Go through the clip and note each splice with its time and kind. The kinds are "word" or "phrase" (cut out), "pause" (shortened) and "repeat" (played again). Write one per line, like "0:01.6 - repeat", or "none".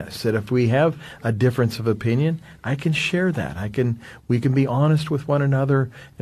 none